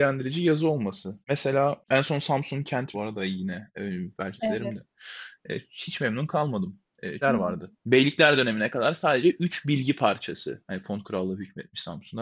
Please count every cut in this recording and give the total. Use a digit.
4